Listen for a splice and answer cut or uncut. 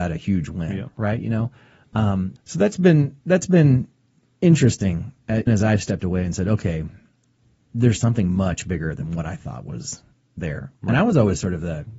cut